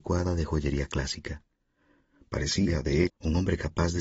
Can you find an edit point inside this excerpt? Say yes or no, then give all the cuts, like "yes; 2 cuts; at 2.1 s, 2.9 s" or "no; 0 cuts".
yes; 1 cut; at 3.1 s